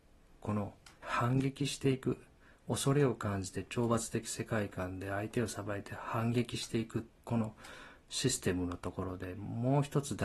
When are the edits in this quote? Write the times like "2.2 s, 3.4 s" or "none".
1.0 s, 7.1 s